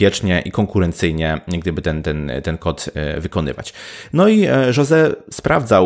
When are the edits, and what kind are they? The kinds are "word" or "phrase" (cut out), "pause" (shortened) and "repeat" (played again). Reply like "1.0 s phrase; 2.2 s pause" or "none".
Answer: none